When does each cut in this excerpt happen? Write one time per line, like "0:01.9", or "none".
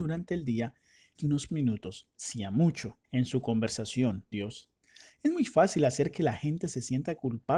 0:01.2
0:01.5
0:02.1
0:03.0
0:04.3